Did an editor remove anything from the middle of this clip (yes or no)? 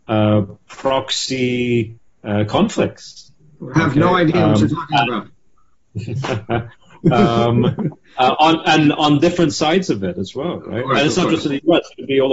no